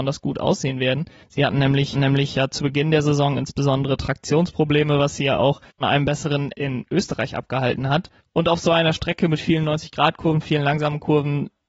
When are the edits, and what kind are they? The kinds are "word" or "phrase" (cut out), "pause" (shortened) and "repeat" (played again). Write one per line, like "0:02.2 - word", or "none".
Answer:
0:01.9 - repeat
0:05.8 - word
0:06.5 - word